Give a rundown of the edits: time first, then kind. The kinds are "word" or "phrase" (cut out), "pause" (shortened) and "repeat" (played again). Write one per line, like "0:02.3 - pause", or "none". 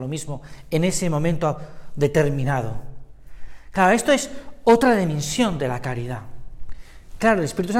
none

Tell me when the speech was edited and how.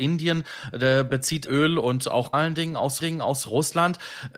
0:01.5 - phrase
0:02.3 - phrase
0:03.0 - repeat

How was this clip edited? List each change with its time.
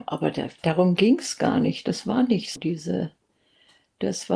0:02.6 - word

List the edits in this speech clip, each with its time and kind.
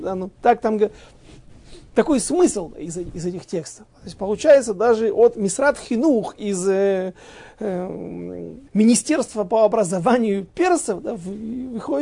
0:08.7 - pause

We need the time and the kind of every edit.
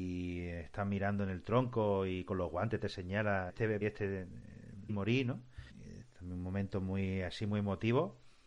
0:03.5 - word
0:03.8 - phrase
0:04.9 - word
0:05.7 - pause

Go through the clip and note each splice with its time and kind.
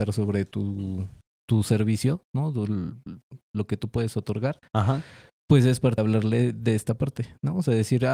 0:06.0 - word

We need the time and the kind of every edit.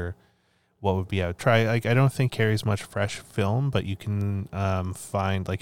0:01.4 - phrase
0:02.3 - word

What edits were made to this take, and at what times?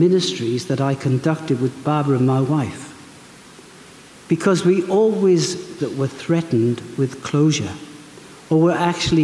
0:05.8 - phrase

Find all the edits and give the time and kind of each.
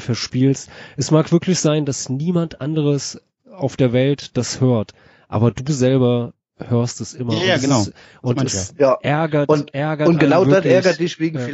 none

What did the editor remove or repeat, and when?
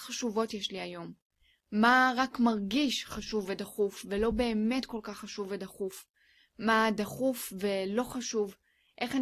none

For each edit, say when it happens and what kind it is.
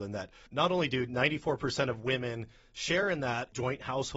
none

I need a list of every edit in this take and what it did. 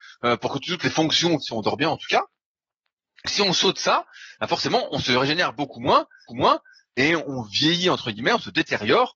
0:01.4 - phrase
0:03.2 - word
0:06.3 - repeat

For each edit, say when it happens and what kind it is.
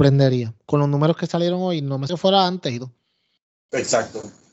0:02.1 - word

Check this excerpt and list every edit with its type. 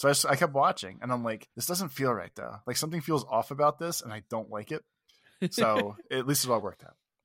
0:01.5 - pause

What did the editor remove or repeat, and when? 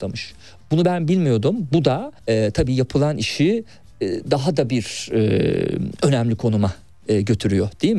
0:02.2 - pause

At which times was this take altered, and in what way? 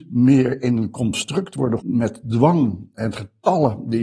0:01.8 - word

